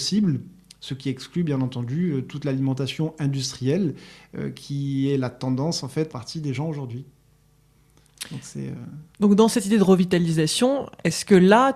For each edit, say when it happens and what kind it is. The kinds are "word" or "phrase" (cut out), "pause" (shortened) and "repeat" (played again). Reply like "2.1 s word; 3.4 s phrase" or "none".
6.1 s phrase; 9.1 s pause